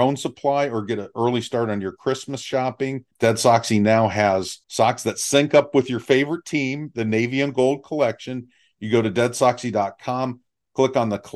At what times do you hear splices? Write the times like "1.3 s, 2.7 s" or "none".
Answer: 3.1 s, 4.6 s